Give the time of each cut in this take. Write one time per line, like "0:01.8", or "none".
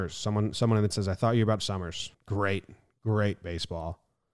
0:00.9
0:01.6
0:02.1